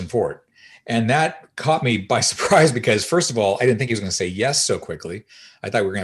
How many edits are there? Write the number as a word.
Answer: zero